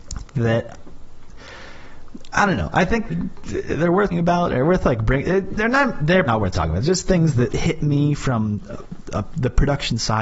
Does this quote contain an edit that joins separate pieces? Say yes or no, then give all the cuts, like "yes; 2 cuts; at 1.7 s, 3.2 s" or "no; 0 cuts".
yes; 4 cuts; at 3.1 s, 4.1 s, 6.3 s, 7.5 s